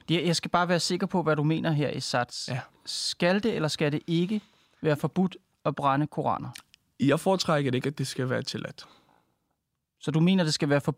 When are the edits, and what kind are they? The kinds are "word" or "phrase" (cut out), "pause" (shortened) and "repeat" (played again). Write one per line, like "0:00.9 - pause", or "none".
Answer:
none